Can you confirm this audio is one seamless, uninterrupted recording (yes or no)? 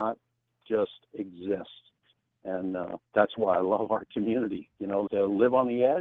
no